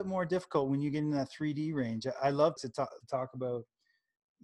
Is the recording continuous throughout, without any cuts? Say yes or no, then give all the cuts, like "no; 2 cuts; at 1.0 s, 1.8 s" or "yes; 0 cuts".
no; 2 cuts; at 2.6 s, 3.0 s